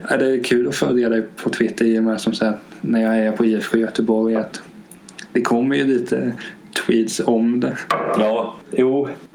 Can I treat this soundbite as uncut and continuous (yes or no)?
yes